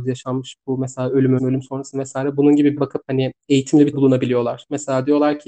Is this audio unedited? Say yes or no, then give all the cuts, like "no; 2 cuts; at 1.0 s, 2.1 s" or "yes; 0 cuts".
no; 3 cuts; at 1.4 s, 2.8 s, 3.9 s